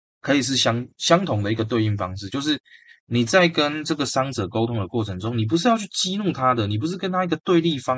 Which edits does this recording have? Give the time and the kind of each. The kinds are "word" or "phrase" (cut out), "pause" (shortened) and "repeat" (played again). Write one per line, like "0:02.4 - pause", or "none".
0:00.9 - pause